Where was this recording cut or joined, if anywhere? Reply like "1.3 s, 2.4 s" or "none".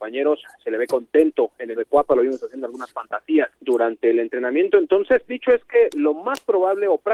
1.8 s, 3.6 s, 5.3 s